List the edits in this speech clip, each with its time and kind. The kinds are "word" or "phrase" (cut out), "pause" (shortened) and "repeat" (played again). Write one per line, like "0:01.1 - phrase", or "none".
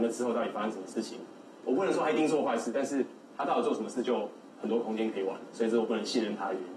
0:04.5 - pause